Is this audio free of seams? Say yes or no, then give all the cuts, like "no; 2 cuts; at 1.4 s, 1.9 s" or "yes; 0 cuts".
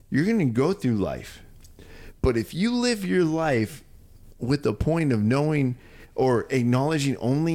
yes; 0 cuts